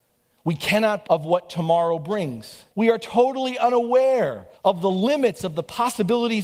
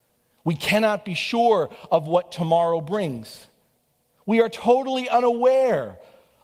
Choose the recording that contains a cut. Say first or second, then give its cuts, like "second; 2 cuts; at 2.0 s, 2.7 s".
first; 3 cuts; at 1.1 s, 2.7 s, 4.6 s